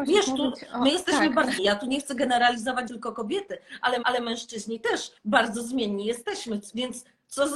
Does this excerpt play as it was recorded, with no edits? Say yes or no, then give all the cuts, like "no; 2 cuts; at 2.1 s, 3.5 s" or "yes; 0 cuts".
no; 4 cuts; at 1.6 s, 2.9 s, 4.0 s, 5.2 s